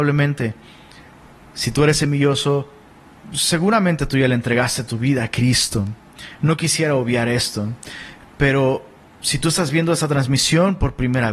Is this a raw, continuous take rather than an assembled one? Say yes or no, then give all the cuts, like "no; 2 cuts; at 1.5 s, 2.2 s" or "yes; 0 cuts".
yes; 0 cuts